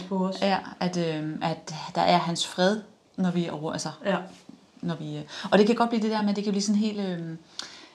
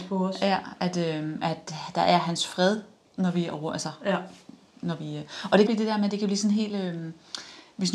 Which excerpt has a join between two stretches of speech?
second; 1 cut; at 5.7 s

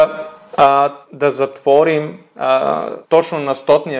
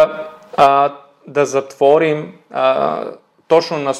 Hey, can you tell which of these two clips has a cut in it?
first; 2 cuts; at 1.0 s, 3.0 s

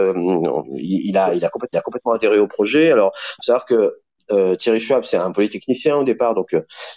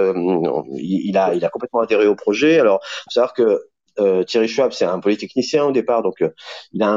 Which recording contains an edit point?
first; 1 cut; at 1.7 s

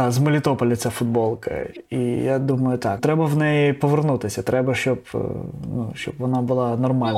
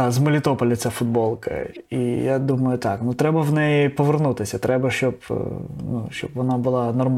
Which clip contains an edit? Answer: first; 1 cut; at 3.0 s

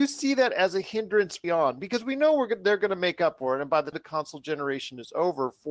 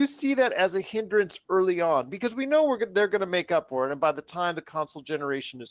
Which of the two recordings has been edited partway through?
first; 2 cuts; at 1.4 s, 3.9 s

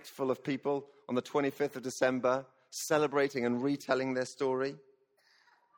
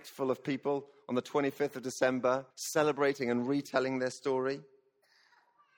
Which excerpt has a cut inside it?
second; 1 cut; at 2.5 s

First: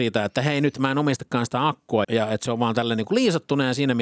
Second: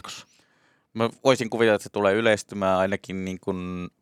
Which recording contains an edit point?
first; 1 cut; at 2.0 s

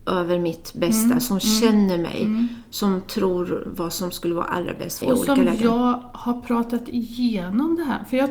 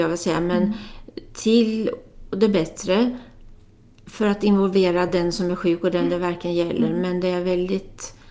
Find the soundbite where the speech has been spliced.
first; 1 cut; at 5.0 s

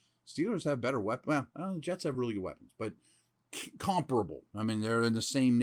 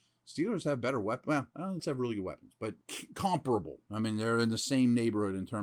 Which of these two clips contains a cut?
second; 2 cuts; at 1.8 s, 2.8 s

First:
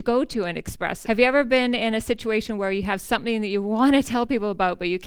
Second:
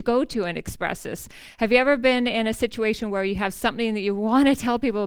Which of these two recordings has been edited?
first; 1 cut; at 1.0 s

